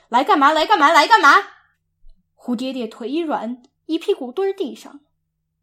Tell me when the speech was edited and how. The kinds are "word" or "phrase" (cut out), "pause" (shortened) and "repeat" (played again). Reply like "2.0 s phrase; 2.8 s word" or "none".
1.7 s pause